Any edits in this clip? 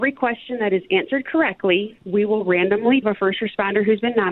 yes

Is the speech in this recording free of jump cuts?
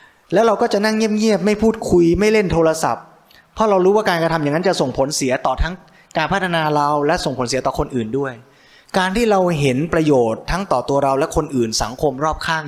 yes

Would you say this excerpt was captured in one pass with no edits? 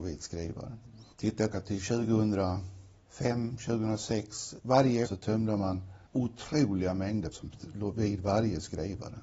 no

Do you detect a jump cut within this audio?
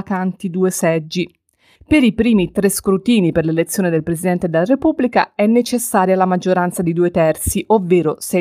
no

